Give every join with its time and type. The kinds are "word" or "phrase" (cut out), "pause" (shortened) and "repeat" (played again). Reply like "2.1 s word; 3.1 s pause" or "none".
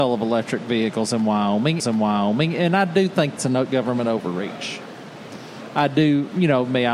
1.8 s repeat; 3.4 s word